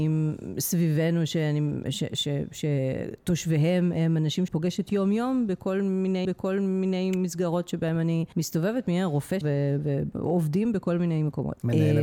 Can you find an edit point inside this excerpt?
yes; 3 cuts; at 4.5 s, 6.2 s, 9.4 s

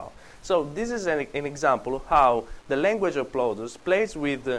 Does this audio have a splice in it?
no; 0 cuts

